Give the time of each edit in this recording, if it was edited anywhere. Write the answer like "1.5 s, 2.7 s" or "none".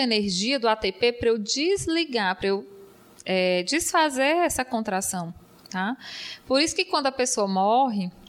none